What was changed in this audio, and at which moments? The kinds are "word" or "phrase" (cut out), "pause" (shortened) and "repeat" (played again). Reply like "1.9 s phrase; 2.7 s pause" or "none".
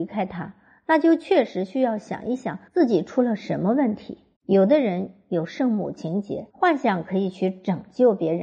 2.7 s pause; 4.3 s pause; 6.5 s pause